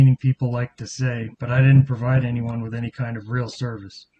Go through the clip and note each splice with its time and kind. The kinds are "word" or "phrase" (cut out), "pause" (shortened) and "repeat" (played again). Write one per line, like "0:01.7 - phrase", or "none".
0:01.3 - pause